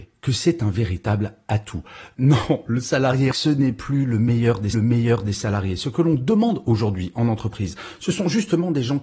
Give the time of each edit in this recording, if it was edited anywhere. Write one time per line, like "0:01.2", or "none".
0:03.3
0:04.7